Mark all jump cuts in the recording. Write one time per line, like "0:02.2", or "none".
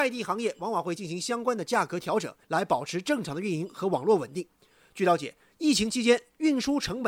0:02.4